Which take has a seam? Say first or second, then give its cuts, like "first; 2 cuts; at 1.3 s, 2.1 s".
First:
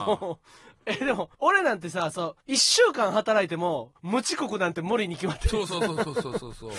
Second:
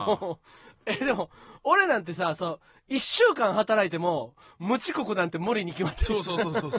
first; 3 cuts; at 1.3 s, 2.4 s, 4.0 s